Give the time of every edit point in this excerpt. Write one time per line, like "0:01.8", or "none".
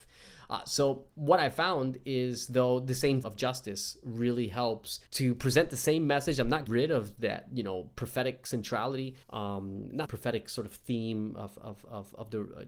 0:01.1
0:03.2
0:05.1
0:06.7
0:09.2
0:10.1